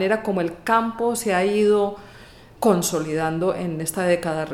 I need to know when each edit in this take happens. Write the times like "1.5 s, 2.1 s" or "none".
2.6 s